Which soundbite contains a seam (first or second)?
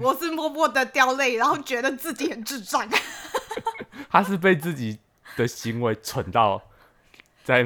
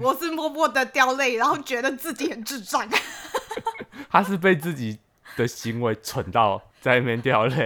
second